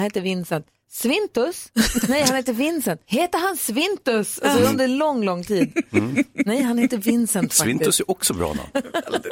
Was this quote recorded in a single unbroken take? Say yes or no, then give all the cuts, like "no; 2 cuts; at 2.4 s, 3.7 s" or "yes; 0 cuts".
no; 1 cut; at 3.0 s